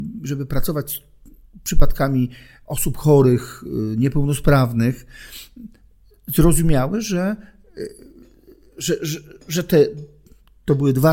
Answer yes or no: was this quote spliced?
no